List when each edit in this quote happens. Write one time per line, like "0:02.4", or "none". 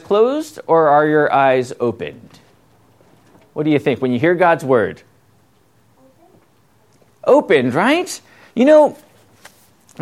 none